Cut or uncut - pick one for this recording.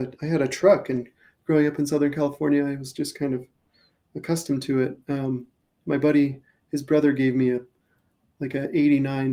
uncut